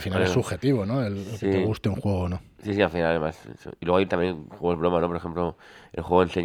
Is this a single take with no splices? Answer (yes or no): yes